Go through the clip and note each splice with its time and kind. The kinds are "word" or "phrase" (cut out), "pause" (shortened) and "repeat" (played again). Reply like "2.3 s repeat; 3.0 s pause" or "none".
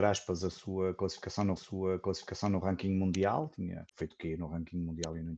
1.6 s repeat; 3.9 s pause